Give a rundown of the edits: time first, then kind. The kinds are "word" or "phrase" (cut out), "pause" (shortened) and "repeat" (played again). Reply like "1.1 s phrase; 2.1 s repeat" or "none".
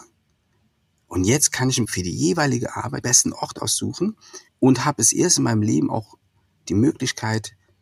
1.8 s word; 3.0 s phrase; 4.5 s pause